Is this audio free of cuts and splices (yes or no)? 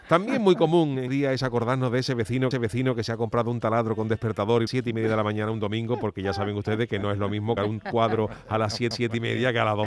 no